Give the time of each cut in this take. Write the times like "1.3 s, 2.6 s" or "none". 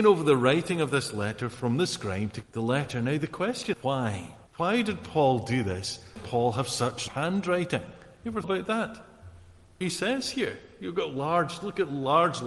2.4 s, 3.7 s, 4.5 s, 6.2 s, 7.1 s, 8.4 s, 9.8 s